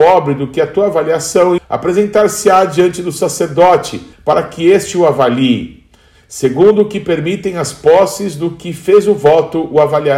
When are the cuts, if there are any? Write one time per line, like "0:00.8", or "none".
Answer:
0:01.6
0:04.1